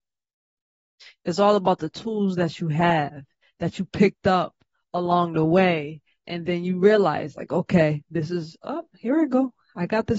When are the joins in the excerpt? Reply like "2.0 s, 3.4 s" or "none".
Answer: none